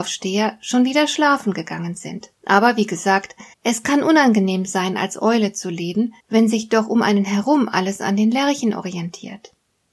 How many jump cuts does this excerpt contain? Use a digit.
3